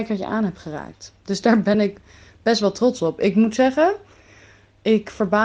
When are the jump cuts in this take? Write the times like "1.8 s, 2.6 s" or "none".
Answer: none